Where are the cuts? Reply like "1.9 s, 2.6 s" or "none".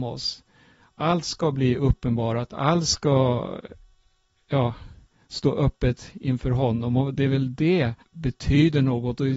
8.0 s